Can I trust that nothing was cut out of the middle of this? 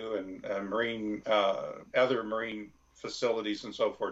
no; 2 cuts; at 1.2 s, 1.9 s

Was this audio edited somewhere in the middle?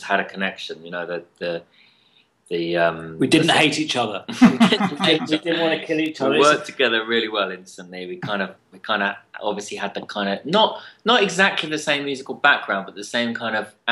no; 0 cuts

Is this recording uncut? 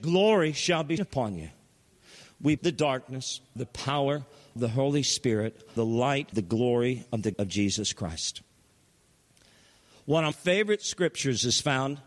no; 8 cuts; at 1.0 s, 2.6 s, 3.6 s, 4.6 s, 5.8 s, 6.3 s, 7.3 s, 10.3 s

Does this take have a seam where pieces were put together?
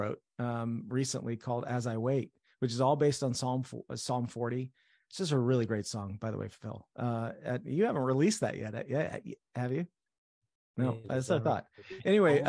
no; 0 cuts

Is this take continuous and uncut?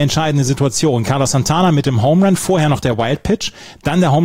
yes; 0 cuts

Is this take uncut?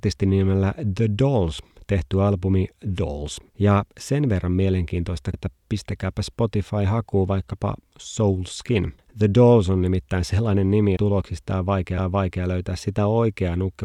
no; 6 cuts; at 3.0 s, 3.5 s, 5.3 s, 9.0 s, 11.0 s, 12.0 s

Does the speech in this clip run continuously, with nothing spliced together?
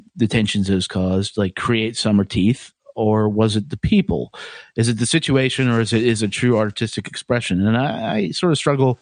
yes; 0 cuts

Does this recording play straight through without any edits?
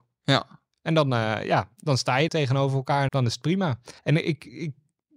no; 3 cuts; at 2.3 s, 3.1 s, 4.0 s

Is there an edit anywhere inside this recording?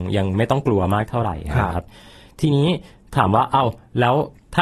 no; 0 cuts

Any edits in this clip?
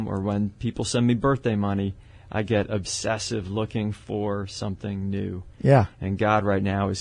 no; 0 cuts

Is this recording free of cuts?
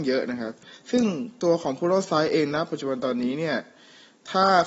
yes; 0 cuts

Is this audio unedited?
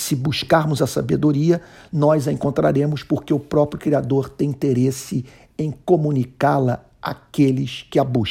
yes; 0 cuts

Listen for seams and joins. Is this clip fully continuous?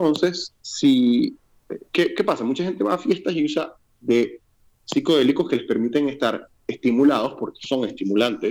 no; 1 cut; at 3.9 s

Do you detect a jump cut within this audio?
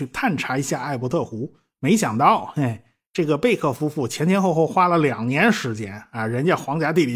no; 0 cuts

